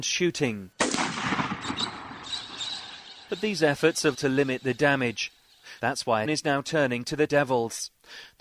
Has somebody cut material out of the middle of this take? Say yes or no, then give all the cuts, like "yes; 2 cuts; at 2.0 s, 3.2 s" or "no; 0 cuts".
yes; 3 cuts; at 4.1 s, 6.2 s, 7.3 s